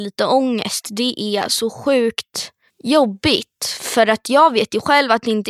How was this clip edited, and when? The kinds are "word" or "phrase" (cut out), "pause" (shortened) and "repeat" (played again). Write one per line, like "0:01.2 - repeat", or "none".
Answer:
none